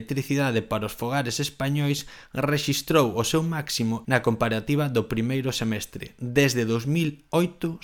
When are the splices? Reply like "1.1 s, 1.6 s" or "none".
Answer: 4.0 s